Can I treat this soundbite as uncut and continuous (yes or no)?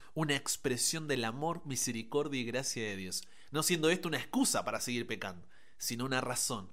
yes